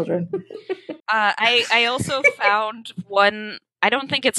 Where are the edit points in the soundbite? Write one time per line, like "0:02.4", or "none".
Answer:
0:01.0